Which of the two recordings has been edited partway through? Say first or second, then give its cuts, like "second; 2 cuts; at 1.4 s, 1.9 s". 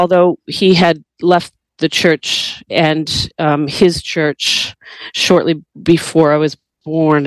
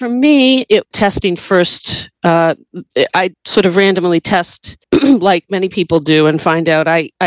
second; 3 cuts; at 0.9 s, 3.3 s, 4.8 s